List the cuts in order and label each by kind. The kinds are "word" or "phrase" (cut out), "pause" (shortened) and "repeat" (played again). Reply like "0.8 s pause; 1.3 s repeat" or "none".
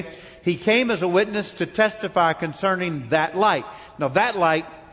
none